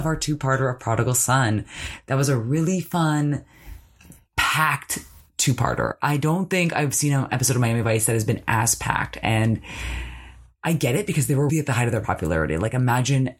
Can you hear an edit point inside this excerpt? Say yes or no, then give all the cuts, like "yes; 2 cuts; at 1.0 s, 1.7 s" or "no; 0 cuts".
yes; 1 cut; at 11.5 s